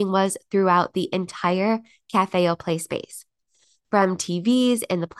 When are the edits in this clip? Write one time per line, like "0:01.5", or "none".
none